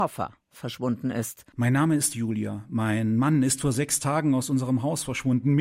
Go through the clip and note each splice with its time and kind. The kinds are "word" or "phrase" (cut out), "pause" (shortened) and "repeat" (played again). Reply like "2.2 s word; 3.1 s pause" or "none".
2.1 s word